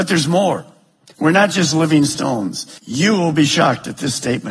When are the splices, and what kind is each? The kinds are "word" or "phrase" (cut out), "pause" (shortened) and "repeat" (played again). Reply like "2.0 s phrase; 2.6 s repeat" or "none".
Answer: 2.8 s pause